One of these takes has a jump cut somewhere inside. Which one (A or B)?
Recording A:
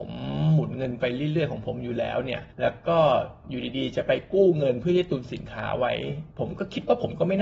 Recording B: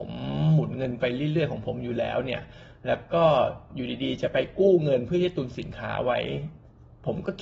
A